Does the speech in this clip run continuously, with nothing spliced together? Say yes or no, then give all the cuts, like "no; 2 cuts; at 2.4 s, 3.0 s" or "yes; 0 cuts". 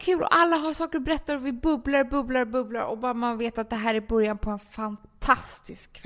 yes; 0 cuts